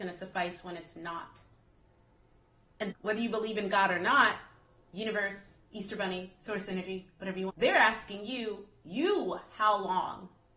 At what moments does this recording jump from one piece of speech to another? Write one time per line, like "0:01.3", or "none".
0:02.9
0:07.5